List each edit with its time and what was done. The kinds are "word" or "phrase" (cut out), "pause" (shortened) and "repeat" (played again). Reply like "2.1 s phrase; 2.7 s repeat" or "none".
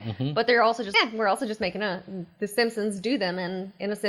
0.9 s word